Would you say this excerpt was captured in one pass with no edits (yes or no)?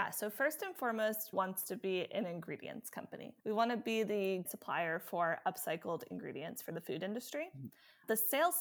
no